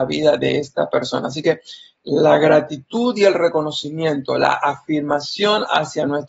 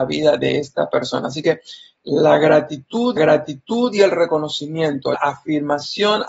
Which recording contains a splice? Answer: second; 2 cuts; at 3.2 s, 5.1 s

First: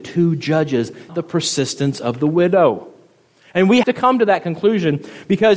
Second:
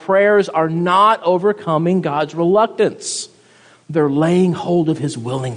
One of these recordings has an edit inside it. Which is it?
first; 2 cuts; at 1.1 s, 3.8 s

